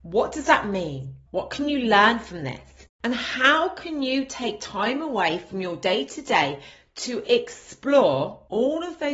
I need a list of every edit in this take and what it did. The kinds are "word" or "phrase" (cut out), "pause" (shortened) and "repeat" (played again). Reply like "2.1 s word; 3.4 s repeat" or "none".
1.3 s pause